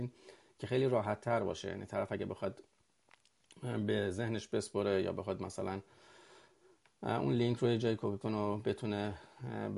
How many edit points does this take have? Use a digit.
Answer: 1